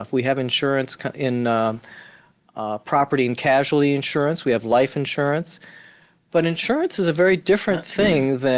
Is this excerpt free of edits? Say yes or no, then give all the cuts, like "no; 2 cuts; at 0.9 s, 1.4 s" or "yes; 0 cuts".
yes; 0 cuts